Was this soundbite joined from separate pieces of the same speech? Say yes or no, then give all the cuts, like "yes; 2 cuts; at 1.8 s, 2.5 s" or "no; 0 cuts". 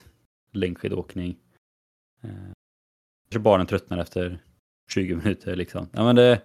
yes; 1 cut; at 3.3 s